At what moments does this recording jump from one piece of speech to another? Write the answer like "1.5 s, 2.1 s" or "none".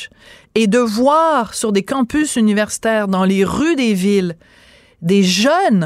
none